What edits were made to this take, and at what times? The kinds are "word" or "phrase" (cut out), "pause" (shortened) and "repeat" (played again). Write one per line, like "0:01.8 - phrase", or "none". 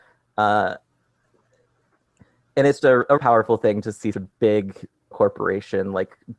0:02.8 - word
0:03.2 - word
0:04.1 - word
0:05.1 - word